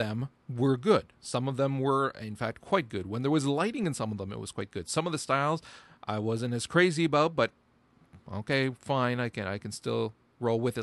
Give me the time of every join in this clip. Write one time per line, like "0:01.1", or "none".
0:08.2